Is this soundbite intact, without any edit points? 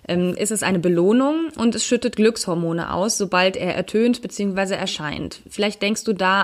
yes; 0 cuts

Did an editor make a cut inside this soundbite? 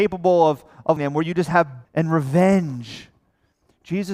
yes; 2 cuts; at 1.0 s, 1.9 s

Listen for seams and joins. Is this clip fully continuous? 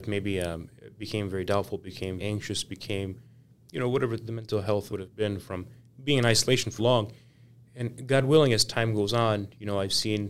no; 3 cuts; at 2.2 s, 4.9 s, 6.8 s

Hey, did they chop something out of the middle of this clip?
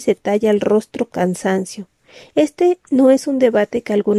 yes; 1 cut; at 1.1 s

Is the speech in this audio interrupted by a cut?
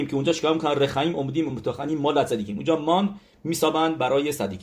no; 0 cuts

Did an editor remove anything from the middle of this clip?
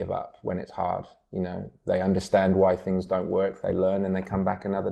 no; 0 cuts

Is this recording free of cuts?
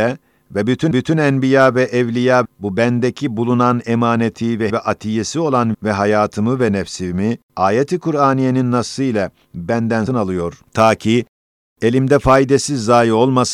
no; 7 cuts; at 0.9 s, 2.4 s, 4.7 s, 5.7 s, 7.5 s, 10.1 s, 10.7 s

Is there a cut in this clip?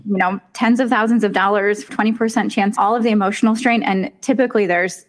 yes; 2 cuts; at 1.9 s, 2.8 s

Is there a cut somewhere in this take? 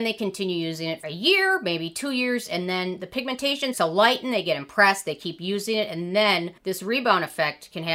yes; 3 cuts; at 1.0 s, 3.7 s, 6.6 s

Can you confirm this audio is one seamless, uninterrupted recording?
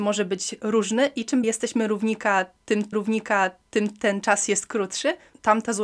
no; 2 cuts; at 1.4 s, 2.9 s

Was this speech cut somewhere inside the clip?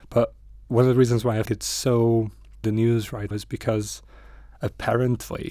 yes; 3 cuts; at 1.5 s, 2.6 s, 3.3 s

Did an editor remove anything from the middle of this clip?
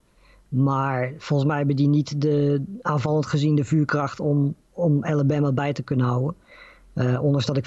no; 0 cuts

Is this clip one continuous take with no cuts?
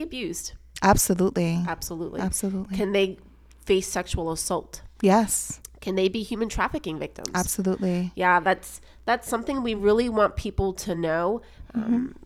yes; 0 cuts

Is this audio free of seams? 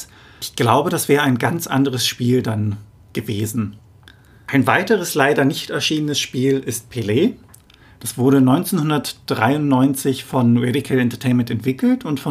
yes; 0 cuts

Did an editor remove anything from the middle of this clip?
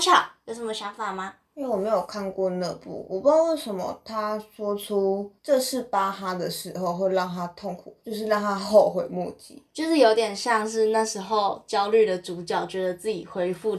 yes; 1 cut; at 5.4 s

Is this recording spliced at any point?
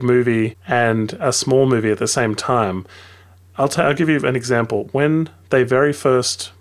no; 0 cuts

